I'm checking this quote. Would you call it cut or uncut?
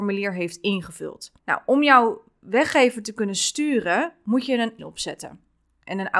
cut